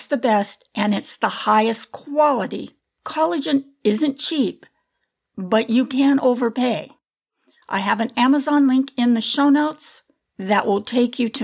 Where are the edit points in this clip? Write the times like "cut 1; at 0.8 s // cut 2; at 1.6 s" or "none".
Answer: none